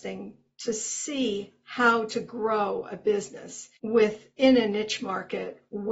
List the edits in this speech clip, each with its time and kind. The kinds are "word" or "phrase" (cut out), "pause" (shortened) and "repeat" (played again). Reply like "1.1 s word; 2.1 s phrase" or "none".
3.8 s pause